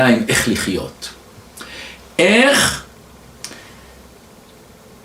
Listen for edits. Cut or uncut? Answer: uncut